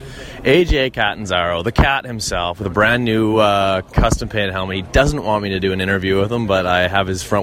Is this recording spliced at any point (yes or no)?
no